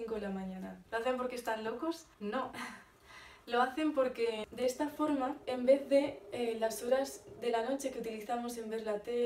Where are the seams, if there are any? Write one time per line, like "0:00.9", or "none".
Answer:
0:02.1

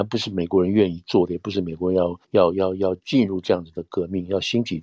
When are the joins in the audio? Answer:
0:02.2

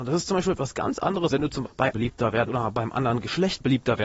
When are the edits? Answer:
0:01.3
0:01.6
0:01.9
0:02.5

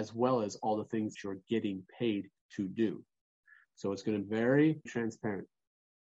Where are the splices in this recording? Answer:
0:01.1
0:04.2
0:04.9

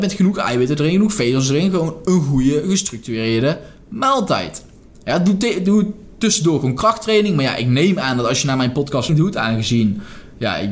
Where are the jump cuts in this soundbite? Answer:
0:09.1

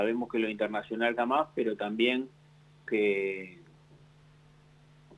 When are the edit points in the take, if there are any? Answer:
0:01.2
0:02.9

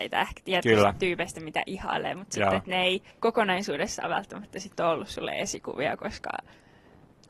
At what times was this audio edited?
0:03.1

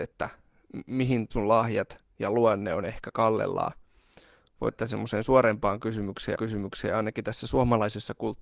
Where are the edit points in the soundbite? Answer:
0:01.3
0:04.7
0:06.4

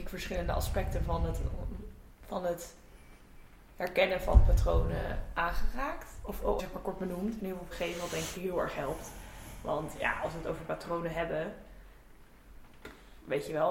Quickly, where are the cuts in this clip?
0:06.6
0:07.7

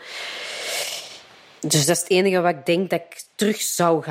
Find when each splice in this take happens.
0:01.3

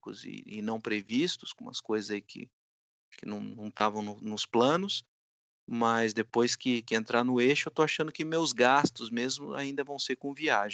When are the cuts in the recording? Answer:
none

